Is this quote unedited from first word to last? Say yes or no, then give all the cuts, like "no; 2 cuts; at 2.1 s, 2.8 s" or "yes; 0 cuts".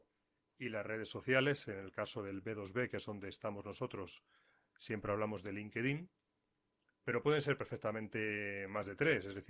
yes; 0 cuts